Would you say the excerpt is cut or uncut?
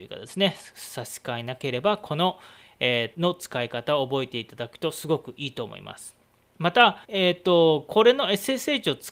cut